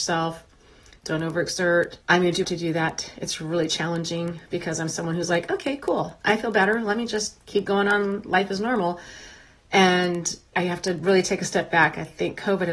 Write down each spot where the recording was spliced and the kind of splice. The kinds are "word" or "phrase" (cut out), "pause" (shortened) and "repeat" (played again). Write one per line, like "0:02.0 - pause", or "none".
0:02.0 - pause
0:02.4 - phrase
0:10.5 - word

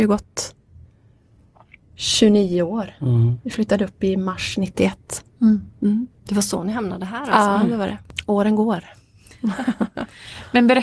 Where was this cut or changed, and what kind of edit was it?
none

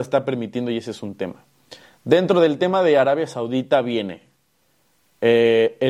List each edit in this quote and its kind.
none

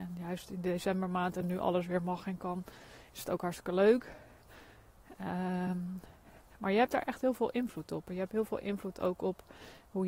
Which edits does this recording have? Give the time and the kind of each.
none

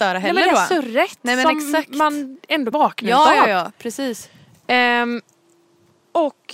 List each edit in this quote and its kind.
0:02.7 - word

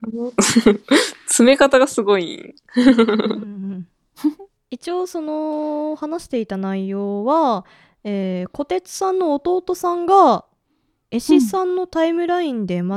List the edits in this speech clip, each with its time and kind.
none

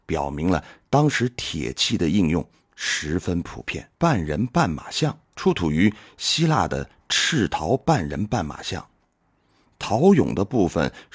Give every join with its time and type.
0:03.9 - pause
0:05.2 - pause

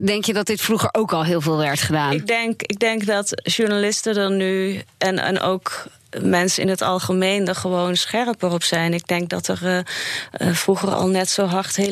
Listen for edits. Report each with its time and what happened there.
none

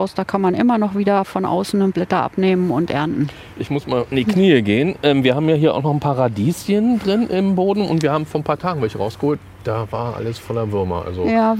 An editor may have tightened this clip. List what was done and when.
0:01.9 - word
0:04.1 - phrase

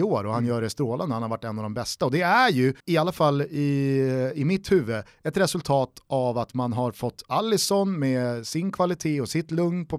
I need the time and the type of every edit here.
0:02.8 - pause

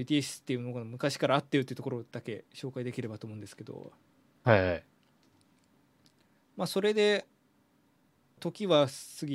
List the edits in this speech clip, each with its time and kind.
0:02.5 - pause
0:08.4 - phrase

